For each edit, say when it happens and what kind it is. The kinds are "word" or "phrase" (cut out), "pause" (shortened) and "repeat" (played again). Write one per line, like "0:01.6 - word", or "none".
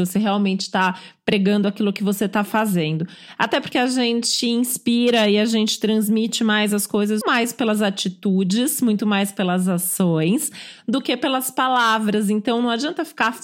0:03.7 - phrase
0:07.2 - word